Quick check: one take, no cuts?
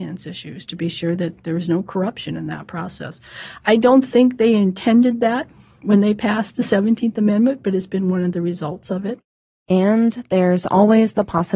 yes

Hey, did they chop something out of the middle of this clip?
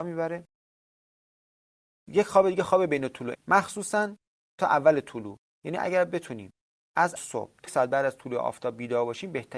yes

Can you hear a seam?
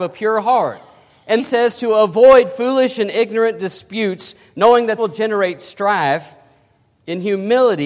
yes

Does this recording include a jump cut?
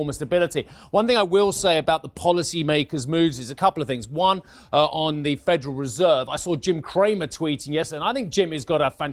no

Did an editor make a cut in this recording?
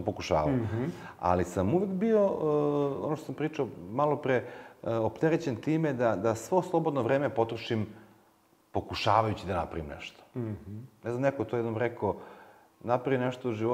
no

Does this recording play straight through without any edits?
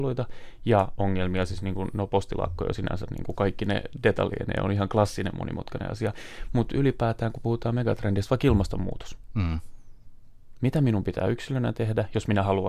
yes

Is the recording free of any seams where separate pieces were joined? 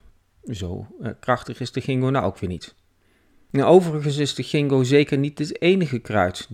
yes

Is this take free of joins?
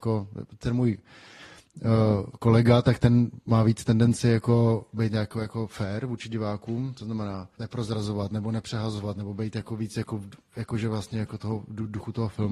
no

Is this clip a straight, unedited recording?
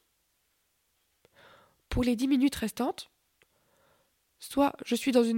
yes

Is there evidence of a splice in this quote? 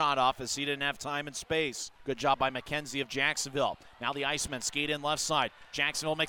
yes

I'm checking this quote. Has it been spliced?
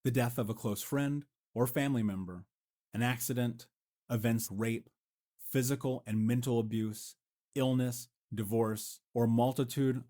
yes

